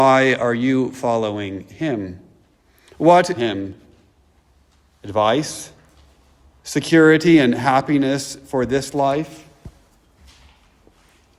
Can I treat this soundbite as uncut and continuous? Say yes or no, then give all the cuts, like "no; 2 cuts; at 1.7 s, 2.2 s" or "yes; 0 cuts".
no; 1 cut; at 3.4 s